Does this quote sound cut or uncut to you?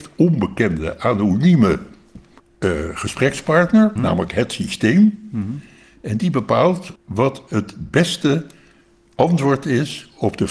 cut